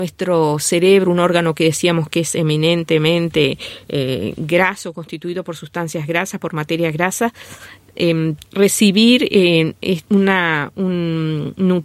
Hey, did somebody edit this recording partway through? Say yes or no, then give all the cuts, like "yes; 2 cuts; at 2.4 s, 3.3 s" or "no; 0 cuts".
yes; 1 cut; at 8.4 s